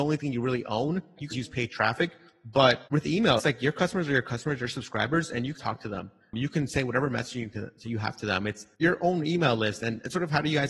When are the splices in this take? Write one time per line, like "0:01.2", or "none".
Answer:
0:01.3
0:02.9
0:03.4
0:05.6
0:08.7